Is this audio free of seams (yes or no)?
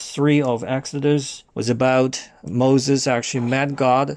no